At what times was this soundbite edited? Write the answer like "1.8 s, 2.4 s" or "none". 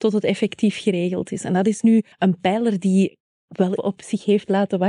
2.1 s, 3.8 s